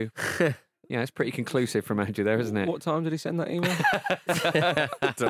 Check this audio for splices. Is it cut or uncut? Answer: uncut